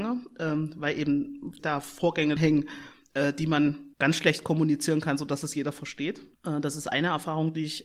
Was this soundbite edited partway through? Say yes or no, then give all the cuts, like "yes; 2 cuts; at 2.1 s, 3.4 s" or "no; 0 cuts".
yes; 4 cuts; at 1.6 s, 2.4 s, 3.9 s, 6.3 s